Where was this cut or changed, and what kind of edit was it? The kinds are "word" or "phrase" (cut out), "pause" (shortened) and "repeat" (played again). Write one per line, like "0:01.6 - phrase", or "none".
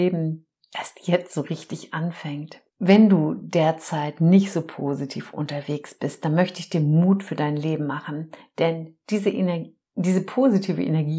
0:02.7 - pause